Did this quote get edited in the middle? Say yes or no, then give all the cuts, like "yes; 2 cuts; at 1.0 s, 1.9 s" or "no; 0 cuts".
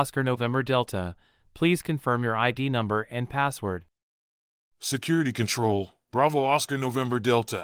no; 0 cuts